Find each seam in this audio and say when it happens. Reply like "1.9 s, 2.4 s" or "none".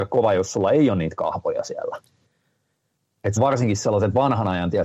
3.4 s